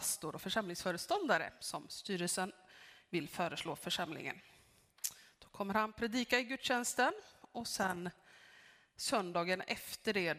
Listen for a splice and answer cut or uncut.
uncut